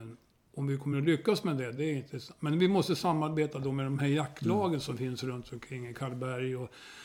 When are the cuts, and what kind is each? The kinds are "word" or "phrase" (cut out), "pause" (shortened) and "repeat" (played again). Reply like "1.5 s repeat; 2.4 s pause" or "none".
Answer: none